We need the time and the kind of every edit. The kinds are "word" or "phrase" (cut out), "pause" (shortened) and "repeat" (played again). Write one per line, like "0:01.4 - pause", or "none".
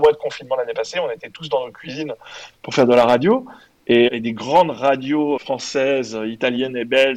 0:04.1 - word
0:05.4 - word